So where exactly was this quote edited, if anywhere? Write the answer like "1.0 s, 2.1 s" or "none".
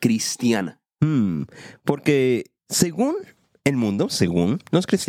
none

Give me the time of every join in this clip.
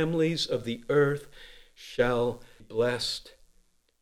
2.6 s

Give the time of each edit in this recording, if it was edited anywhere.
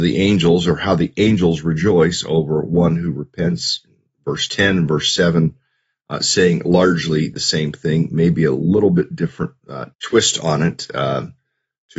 9.9 s

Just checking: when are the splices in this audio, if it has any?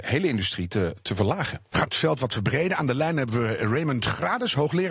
1.9 s

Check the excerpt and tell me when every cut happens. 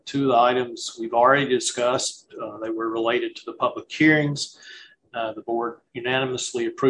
none

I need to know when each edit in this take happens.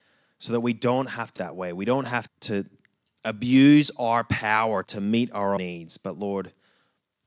1.4 s, 2.3 s, 4.8 s, 5.6 s

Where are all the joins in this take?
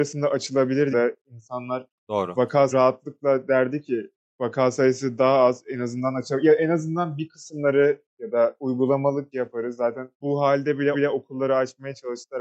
0.9 s, 2.7 s, 4.2 s, 9.3 s, 10.1 s, 10.9 s

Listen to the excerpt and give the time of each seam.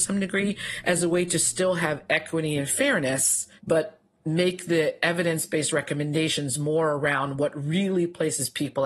3.6 s

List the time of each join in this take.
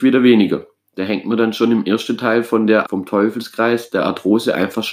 2.8 s

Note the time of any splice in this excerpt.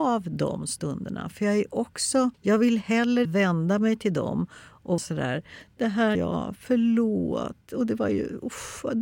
2.3 s, 3.2 s, 5.0 s, 6.1 s

